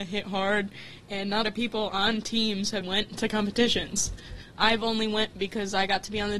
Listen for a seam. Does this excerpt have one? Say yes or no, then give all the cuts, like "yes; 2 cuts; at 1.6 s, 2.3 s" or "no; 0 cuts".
yes; 2 cuts; at 1.4 s, 2.8 s